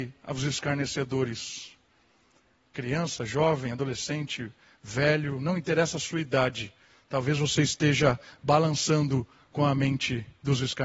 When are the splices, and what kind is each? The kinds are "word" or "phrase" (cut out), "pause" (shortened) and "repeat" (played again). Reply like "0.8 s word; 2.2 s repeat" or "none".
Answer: none